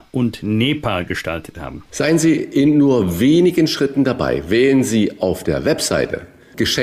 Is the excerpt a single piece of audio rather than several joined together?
no; 1 cut; at 1.9 s

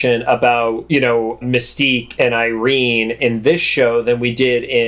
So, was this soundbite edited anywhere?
no; 0 cuts

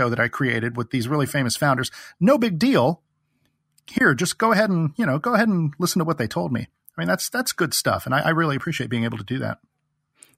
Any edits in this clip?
no; 0 cuts

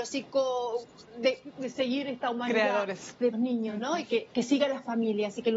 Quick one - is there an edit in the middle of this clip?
yes; 1 cut; at 3.3 s

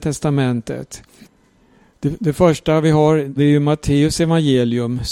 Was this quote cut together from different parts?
yes; 1 cut; at 3.4 s

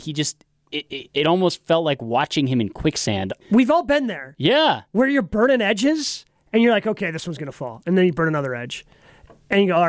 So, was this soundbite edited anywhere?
yes; 1 cut; at 3.4 s

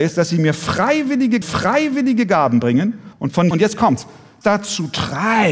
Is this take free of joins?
no; 4 cuts; at 1.4 s, 3.1 s, 3.5 s, 4.4 s

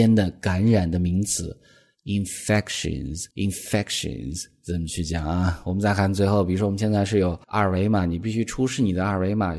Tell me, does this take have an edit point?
yes; 2 cuts; at 3.3 s, 7.4 s

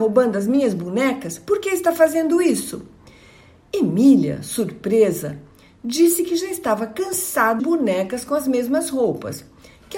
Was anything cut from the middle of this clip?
yes; 1 cut; at 7.6 s

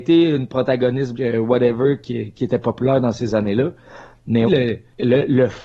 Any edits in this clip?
yes; 3 cuts; at 1.1 s, 2.4 s, 4.5 s

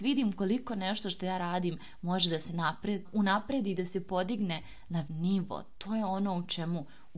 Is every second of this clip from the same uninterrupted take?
no; 2 cuts; at 3.0 s, 5.1 s

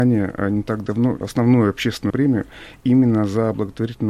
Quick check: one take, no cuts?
no; 2 cuts; at 1.2 s, 2.1 s

